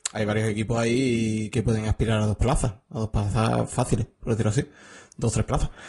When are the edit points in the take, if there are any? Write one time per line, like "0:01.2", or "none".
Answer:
none